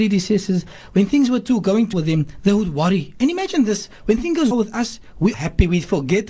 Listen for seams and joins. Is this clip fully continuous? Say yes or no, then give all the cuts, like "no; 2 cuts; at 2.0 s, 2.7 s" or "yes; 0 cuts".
no; 3 cuts; at 1.9 s, 4.5 s, 5.3 s